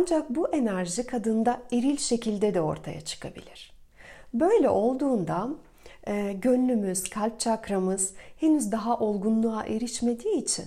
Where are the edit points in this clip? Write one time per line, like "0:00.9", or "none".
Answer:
none